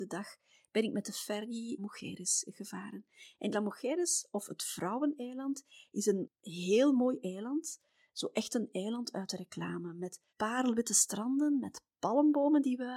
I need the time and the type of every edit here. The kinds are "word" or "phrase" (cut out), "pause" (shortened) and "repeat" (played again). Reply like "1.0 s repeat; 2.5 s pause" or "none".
1.8 s phrase; 3.5 s word; 10.3 s pause